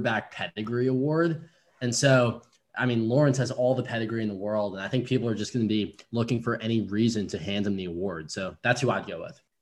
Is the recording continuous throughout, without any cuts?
yes; 0 cuts

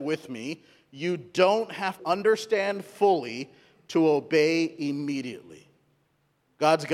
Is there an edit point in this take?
yes; 1 cut; at 2.0 s

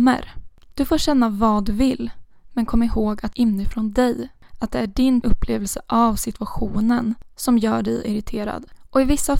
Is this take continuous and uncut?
no; 2 cuts; at 3.3 s, 5.2 s

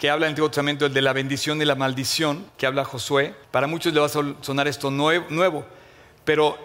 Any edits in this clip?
yes; 2 cuts; at 2.5 s, 3.4 s

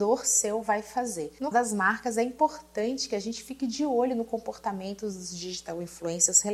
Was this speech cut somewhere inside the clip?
yes; 1 cut; at 1.5 s

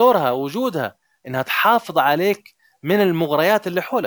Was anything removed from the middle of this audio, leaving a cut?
no; 0 cuts

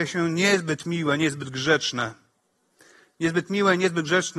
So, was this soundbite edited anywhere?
no; 0 cuts

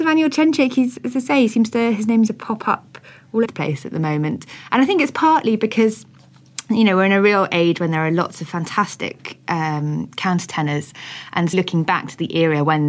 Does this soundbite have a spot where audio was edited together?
yes; 3 cuts; at 2.3 s, 3.4 s, 11.5 s

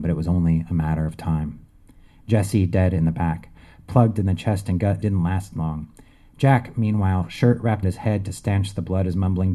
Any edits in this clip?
yes; 2 cuts; at 5.0 s, 7.8 s

